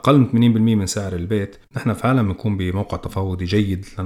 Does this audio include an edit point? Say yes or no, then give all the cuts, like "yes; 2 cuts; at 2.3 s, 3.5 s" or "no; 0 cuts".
yes; 1 cut; at 1.6 s